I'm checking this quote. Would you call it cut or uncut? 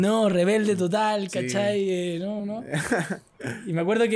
cut